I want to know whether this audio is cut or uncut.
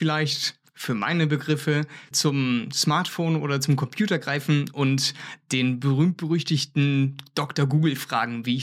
cut